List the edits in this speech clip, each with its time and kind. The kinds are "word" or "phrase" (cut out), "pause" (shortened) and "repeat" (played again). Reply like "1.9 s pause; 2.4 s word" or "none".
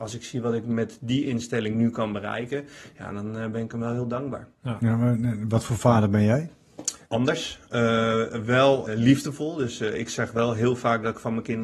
4.5 s pause; 7.0 s pause; 8.8 s word